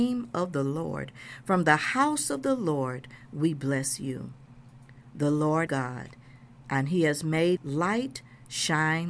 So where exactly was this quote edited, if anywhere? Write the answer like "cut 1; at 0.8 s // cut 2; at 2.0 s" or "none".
cut 1; at 5.7 s // cut 2; at 7.6 s